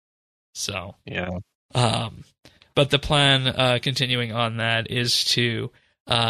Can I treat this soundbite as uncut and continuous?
yes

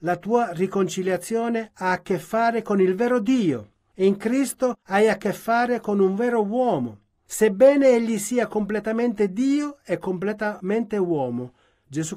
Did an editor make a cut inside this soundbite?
no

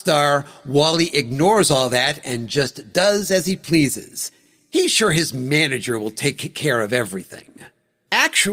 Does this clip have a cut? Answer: no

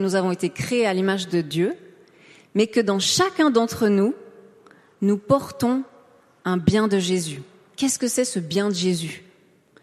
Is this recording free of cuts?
yes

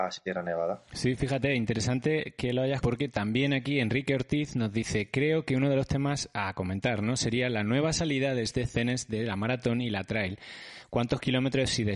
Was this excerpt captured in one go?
no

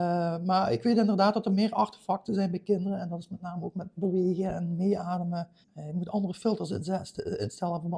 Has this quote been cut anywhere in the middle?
yes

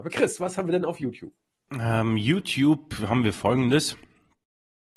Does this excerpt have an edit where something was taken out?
no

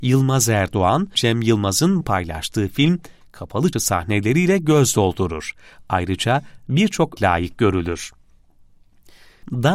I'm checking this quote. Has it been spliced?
yes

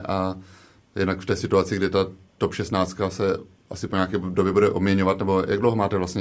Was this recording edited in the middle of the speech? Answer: no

